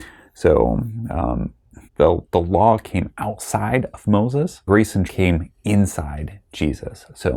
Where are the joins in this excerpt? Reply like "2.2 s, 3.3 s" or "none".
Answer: 1.9 s, 4.7 s, 5.1 s